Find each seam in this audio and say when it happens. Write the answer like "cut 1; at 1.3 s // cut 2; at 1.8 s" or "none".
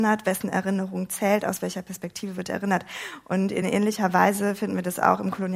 none